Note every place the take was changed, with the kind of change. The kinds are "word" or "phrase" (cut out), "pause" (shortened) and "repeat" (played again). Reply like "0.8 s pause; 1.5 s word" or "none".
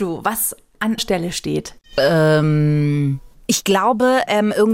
1.0 s word; 1.8 s pause